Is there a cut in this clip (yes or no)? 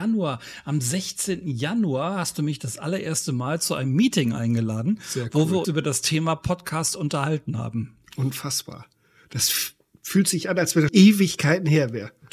yes